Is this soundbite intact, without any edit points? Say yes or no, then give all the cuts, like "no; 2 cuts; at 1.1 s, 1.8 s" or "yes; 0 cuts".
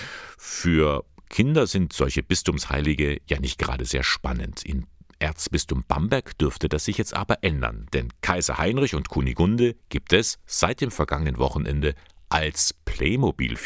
yes; 0 cuts